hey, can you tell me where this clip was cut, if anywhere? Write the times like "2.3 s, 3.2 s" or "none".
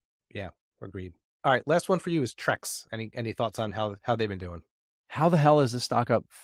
none